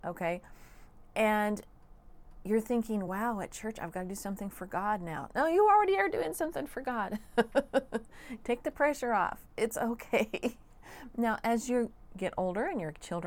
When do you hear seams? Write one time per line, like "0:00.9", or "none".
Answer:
none